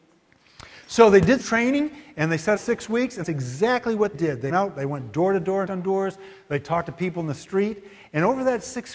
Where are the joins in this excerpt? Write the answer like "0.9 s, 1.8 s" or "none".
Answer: 1.4 s, 2.6 s, 3.2 s, 4.1 s, 4.5 s, 5.7 s